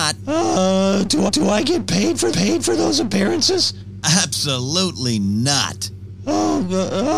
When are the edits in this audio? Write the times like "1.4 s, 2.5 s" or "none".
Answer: 1.3 s, 2.3 s